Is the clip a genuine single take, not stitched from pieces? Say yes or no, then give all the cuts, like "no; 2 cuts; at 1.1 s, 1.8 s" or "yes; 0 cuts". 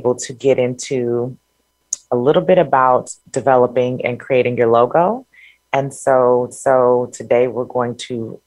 no; 2 cuts; at 3.2 s, 6.5 s